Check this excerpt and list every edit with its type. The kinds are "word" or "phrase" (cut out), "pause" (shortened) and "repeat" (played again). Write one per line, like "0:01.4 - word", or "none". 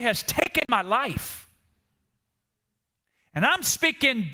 none